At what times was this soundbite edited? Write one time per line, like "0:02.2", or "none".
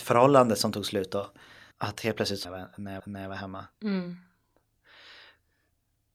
0:01.7
0:02.4
0:03.0

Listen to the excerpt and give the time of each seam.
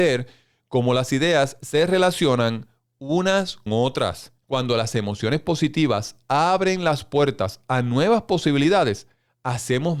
0:03.7
0:04.4

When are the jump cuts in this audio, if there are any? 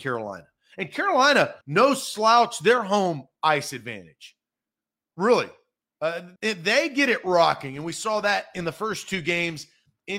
0:01.6
0:06.4

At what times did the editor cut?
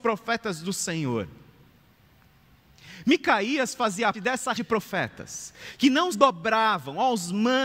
0:04.1
0:04.5
0:06.1

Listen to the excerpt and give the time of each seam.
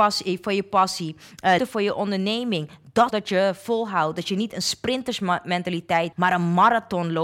0:01.6
0:03.1
0:06.1

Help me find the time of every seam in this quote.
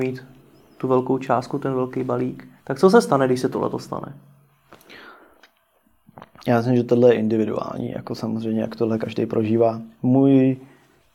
0:02.6

